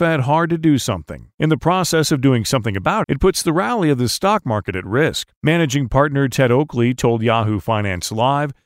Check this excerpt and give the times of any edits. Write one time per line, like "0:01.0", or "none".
0:01.3
0:03.0
0:05.4